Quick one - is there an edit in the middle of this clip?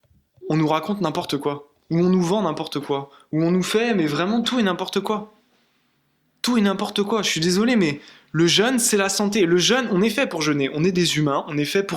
no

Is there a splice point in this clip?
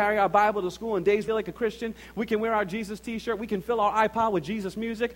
yes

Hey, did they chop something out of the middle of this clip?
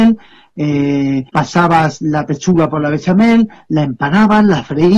yes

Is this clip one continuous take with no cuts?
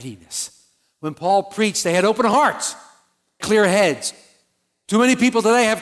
no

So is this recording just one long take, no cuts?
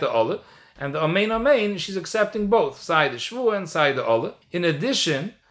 no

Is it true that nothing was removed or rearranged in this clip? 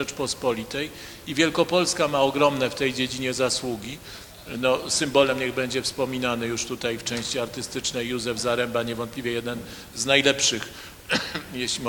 yes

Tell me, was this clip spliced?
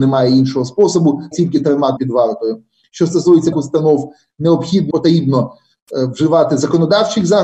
yes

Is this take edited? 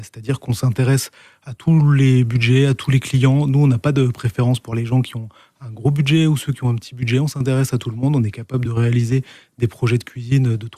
no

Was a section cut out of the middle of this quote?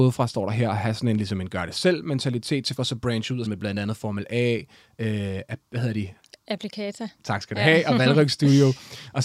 yes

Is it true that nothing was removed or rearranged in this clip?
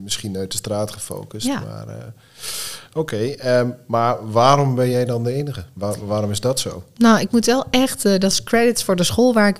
yes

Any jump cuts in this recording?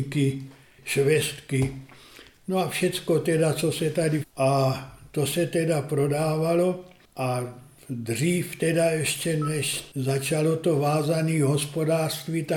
yes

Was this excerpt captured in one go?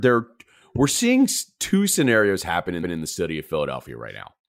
no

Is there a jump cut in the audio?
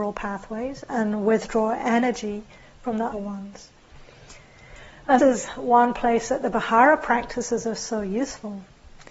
yes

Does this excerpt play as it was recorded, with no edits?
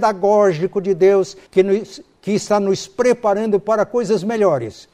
no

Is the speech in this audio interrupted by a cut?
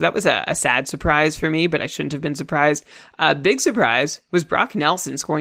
no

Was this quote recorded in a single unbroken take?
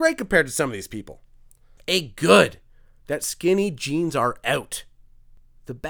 yes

